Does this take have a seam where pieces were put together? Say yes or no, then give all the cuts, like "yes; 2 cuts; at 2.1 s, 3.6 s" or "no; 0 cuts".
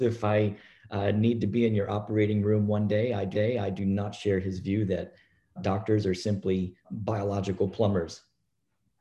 yes; 3 cuts; at 3.3 s, 5.6 s, 6.8 s